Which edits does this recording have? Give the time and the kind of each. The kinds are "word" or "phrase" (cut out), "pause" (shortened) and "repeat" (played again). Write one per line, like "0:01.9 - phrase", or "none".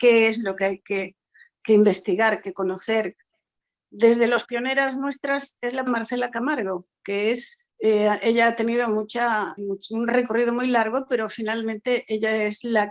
0:04.4 - phrase
0:05.9 - word
0:07.7 - pause
0:09.6 - word